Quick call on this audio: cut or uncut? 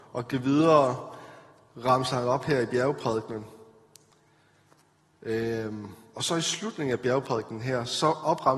uncut